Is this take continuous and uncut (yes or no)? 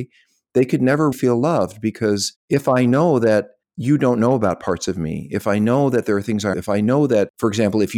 no